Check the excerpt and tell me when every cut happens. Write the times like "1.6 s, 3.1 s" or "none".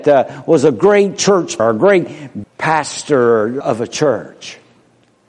1.6 s, 2.4 s, 3.6 s